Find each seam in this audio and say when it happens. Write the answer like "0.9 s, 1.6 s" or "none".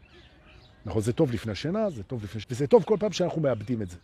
2.4 s